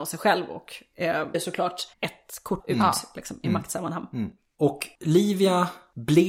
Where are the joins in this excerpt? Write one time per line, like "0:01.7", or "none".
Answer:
0:01.3
0:01.9
0:02.6

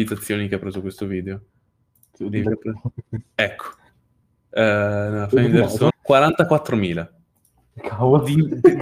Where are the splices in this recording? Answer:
0:02.4
0:05.9

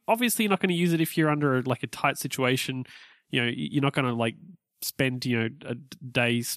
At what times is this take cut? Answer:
none

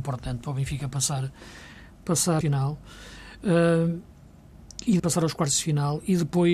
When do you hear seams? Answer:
0:02.4
0:05.0

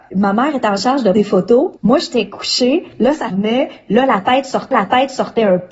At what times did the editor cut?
0:01.1
0:01.8
0:03.3
0:04.7

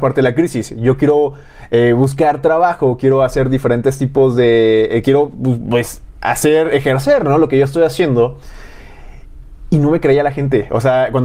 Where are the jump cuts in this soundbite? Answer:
none

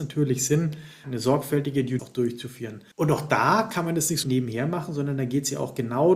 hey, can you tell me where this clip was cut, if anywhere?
0:01.0
0:02.0
0:02.9
0:04.2

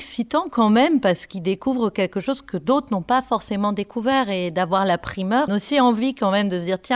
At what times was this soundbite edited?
0:05.5

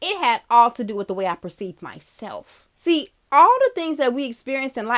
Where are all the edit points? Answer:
0:02.7

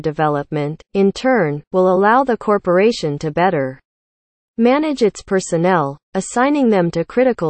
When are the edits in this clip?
none

